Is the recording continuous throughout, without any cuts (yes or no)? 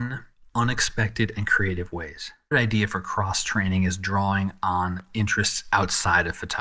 no